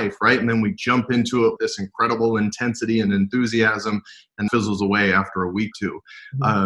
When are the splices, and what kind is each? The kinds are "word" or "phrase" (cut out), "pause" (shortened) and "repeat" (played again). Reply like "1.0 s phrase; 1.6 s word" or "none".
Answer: 1.6 s word; 4.5 s word; 5.7 s word